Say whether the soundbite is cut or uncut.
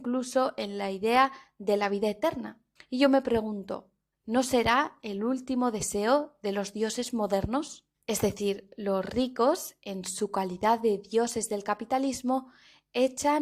cut